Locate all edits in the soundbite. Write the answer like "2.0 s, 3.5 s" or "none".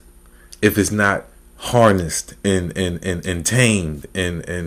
1.4 s